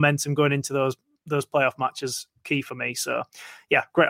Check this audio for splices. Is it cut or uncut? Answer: uncut